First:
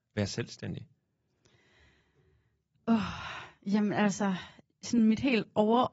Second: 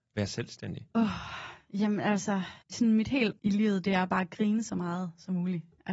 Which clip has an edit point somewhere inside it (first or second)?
second